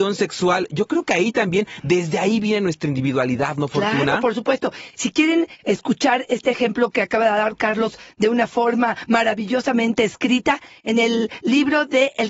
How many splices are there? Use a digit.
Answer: 0